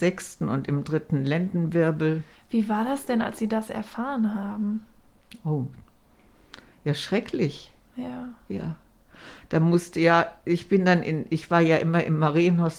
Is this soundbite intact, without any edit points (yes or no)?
yes